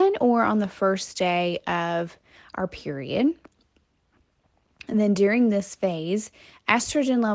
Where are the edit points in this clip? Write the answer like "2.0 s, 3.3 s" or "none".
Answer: none